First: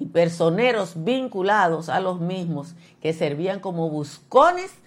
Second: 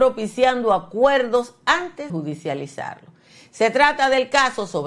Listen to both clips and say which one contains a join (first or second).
second